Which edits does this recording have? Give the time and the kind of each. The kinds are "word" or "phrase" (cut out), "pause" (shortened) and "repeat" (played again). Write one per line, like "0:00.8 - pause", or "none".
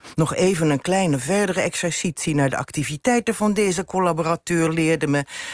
none